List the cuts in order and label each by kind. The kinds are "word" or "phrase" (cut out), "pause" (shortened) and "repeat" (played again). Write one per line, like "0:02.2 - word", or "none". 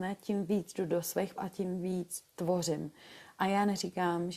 0:01.4 - word